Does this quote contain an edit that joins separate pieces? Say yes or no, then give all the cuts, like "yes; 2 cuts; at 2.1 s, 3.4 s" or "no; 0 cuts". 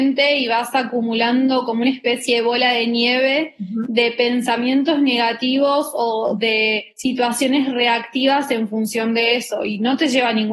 yes; 1 cut; at 6.9 s